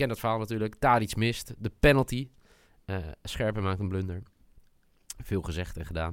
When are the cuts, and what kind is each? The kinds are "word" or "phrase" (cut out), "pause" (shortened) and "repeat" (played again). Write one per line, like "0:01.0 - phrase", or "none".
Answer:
none